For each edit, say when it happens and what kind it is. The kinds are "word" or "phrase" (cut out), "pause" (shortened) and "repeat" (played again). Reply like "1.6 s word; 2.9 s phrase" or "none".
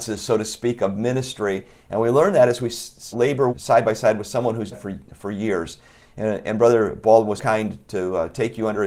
3.1 s word; 3.5 s word; 4.7 s word; 7.4 s word